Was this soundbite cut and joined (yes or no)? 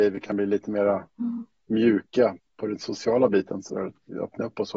yes